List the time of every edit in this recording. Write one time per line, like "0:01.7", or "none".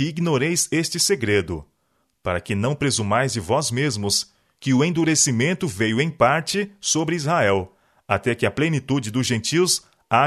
none